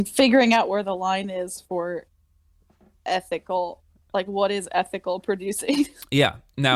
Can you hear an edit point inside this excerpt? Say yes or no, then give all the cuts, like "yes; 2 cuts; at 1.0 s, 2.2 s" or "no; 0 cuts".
no; 0 cuts